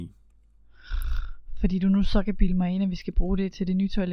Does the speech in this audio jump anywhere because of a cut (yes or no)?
no